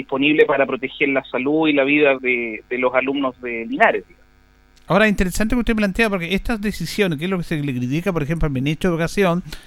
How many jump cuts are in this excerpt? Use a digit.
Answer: 1